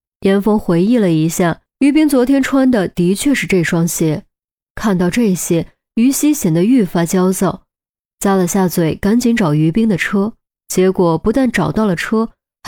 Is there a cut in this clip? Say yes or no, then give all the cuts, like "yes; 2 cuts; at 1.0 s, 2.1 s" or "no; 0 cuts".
no; 0 cuts